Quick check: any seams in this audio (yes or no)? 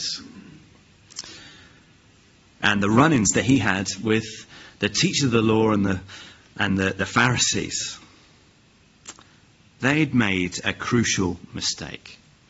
no